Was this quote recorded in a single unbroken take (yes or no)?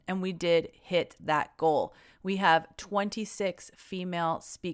yes